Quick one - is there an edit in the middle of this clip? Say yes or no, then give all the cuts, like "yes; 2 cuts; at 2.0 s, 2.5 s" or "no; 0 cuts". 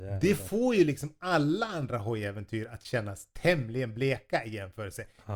no; 0 cuts